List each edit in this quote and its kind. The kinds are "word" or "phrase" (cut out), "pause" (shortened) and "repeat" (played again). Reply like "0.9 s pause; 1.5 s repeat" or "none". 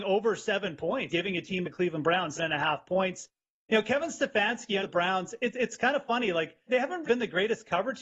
1.1 s word; 1.6 s word; 2.4 s word; 4.8 s word; 6.7 s word; 7.1 s word